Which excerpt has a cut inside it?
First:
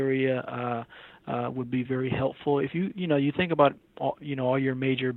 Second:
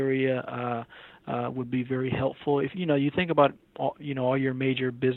second; 1 cut; at 2.7 s

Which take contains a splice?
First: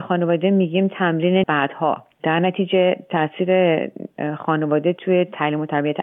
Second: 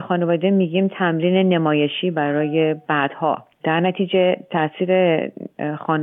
first; 1 cut; at 1.4 s

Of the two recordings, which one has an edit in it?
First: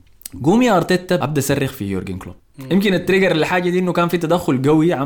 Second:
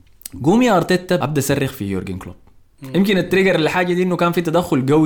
first; 1 cut; at 2.4 s

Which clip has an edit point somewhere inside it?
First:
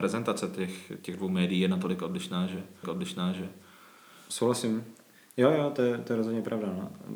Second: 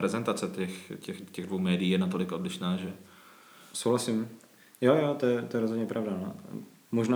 first; 2 cuts; at 1.0 s, 2.8 s

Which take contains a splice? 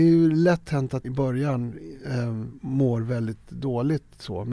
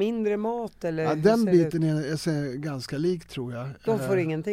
first; 1 cut; at 1.0 s

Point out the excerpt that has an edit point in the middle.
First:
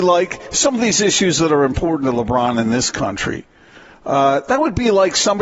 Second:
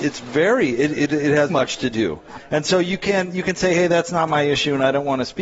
second; 1 cut; at 1.5 s

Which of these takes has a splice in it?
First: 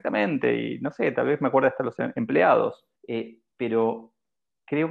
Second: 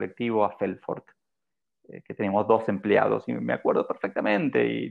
first; 1 cut; at 3.0 s

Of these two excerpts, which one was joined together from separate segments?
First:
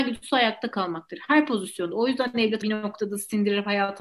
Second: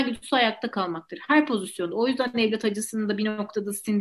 first; 1 cut; at 2.6 s

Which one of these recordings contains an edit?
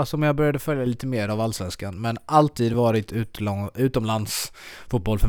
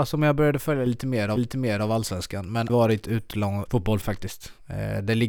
second; 4 cuts; at 1.4 s, 2.7 s, 3.7 s, 4.0 s

